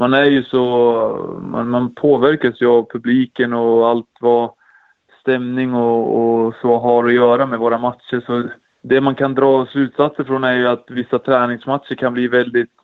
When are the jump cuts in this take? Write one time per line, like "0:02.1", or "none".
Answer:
none